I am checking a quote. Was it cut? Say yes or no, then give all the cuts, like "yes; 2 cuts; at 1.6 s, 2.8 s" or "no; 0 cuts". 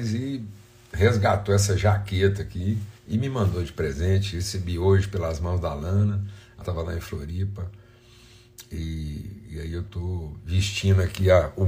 yes; 2 cuts; at 3.0 s, 6.6 s